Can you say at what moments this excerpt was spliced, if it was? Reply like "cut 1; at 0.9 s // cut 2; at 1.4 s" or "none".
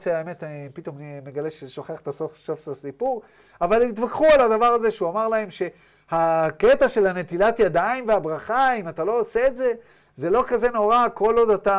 none